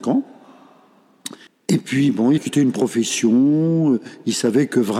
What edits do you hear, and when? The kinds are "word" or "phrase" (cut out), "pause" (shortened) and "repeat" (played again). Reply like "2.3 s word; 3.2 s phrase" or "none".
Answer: 1.5 s pause; 2.4 s word

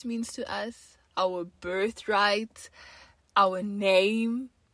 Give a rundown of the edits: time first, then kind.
none

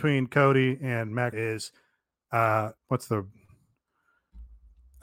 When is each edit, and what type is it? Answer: 1.3 s word; 2.8 s pause

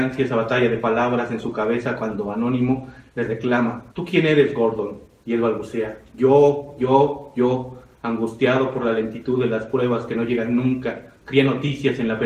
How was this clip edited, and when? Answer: 3.9 s pause; 11.2 s pause

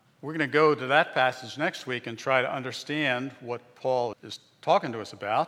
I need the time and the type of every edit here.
4.1 s word

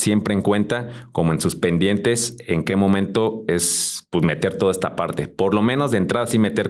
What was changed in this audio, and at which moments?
none

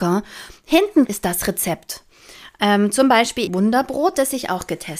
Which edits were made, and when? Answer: 1.0 s word; 3.5 s phrase

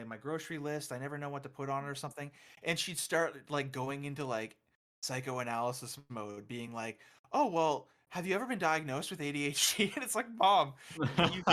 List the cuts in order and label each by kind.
none

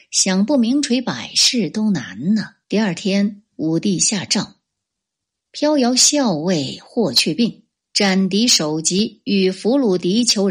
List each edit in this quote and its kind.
2.6 s pause

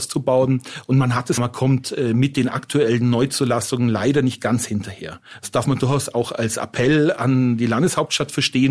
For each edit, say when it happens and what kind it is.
1.4 s phrase

